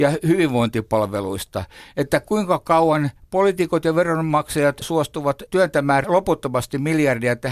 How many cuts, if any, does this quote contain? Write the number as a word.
zero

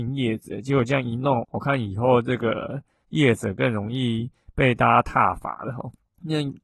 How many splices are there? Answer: one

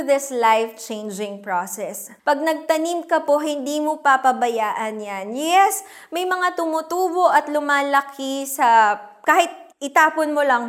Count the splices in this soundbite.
two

